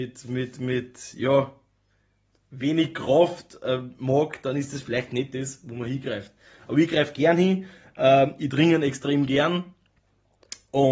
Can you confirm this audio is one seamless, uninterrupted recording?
yes; 0 cuts

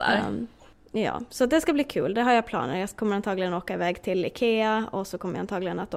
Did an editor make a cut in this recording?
no; 0 cuts

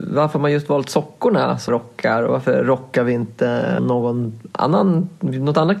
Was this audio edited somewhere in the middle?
yes; 2 cuts; at 1.7 s, 3.8 s

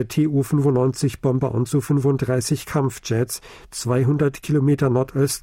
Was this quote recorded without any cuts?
no; 1 cut; at 1.7 s

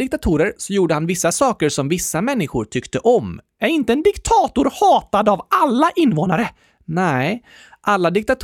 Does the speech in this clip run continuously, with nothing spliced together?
yes; 0 cuts

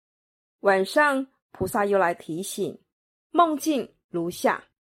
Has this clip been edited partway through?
no; 0 cuts

